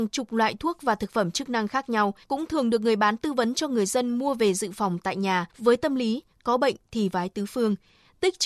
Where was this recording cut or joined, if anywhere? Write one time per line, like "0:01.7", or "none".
0:02.2
0:05.5